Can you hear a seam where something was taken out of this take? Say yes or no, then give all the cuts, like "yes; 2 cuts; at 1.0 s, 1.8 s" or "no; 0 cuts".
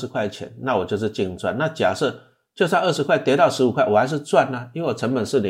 no; 0 cuts